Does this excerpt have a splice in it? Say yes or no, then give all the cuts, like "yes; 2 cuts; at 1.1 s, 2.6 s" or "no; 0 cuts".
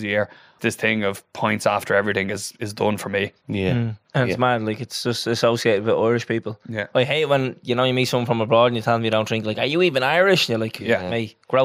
yes; 2 cuts; at 3.4 s, 4.0 s